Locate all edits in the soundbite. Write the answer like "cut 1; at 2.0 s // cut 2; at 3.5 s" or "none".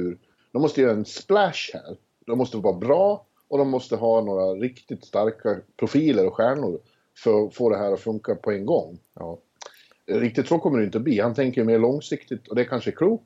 cut 1; at 9.1 s